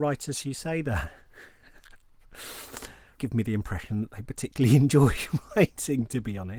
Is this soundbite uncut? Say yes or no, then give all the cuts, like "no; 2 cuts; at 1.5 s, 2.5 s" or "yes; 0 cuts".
no; 1 cut; at 3.2 s